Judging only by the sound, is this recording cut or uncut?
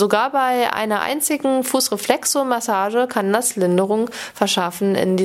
uncut